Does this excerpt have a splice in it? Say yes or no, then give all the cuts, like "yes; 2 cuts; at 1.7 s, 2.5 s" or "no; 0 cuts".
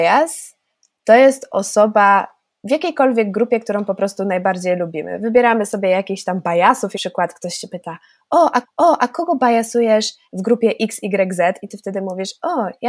yes; 2 cuts; at 6.9 s, 8.6 s